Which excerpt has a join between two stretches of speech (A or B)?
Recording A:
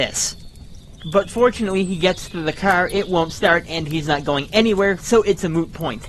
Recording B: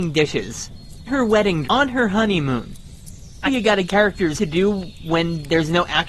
B